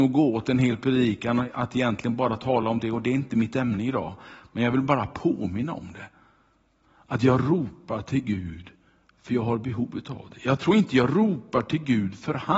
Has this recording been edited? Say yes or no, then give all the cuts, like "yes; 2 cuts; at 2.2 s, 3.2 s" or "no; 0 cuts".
no; 0 cuts